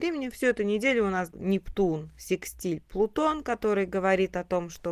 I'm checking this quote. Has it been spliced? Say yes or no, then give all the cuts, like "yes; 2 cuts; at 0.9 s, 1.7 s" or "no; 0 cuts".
yes; 1 cut; at 1.3 s